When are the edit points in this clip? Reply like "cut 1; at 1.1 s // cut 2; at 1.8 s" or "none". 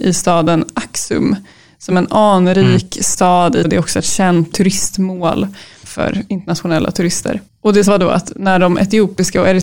cut 1; at 1.9 s // cut 2; at 3.6 s // cut 3; at 4.5 s // cut 4; at 5.8 s // cut 5; at 7.5 s // cut 6; at 7.9 s